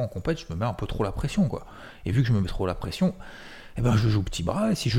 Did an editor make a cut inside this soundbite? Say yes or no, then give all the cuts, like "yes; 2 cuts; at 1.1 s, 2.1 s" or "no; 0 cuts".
no; 0 cuts